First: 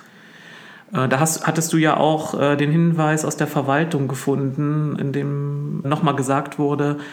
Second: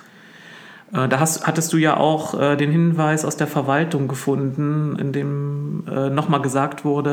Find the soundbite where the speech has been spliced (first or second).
first